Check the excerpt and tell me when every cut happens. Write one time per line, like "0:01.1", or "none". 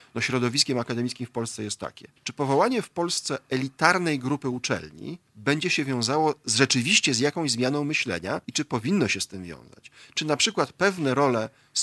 0:02.2
0:05.3
0:08.4